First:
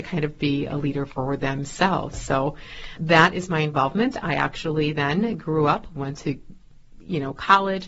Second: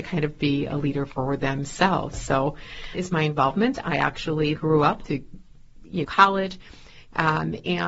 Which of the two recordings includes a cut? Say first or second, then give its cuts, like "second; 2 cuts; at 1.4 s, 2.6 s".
second; 4 cuts; at 2.9 s, 4.6 s, 5.1 s, 6.0 s